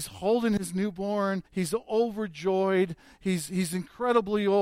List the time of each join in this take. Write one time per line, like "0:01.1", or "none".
0:01.5